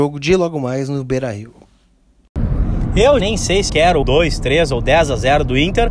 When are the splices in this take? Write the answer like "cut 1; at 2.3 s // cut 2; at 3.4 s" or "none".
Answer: cut 1; at 3.2 s // cut 2; at 3.7 s // cut 3; at 4.0 s